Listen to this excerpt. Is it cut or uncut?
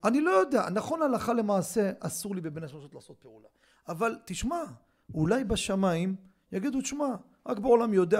uncut